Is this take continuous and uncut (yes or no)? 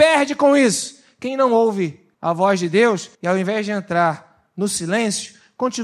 no